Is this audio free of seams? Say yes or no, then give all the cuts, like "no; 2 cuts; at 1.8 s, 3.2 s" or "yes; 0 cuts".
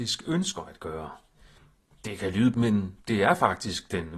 no; 2 cuts; at 2.5 s, 3.0 s